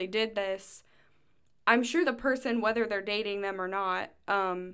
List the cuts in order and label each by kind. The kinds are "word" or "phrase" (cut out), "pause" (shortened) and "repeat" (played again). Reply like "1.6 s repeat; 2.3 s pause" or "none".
2.0 s word